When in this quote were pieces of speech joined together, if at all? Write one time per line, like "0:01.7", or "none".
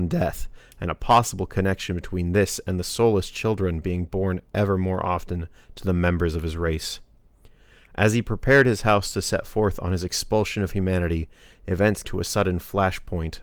0:12.0